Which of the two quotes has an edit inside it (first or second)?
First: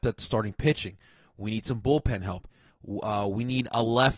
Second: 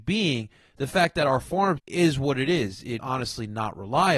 second